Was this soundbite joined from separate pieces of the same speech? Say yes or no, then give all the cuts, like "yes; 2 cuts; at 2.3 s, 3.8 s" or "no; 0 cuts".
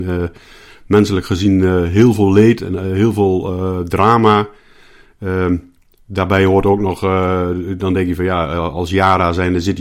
no; 0 cuts